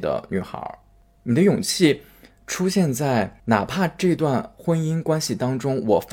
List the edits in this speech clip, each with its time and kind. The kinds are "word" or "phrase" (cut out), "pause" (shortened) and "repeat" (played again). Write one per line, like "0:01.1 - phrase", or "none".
0:03.4 - pause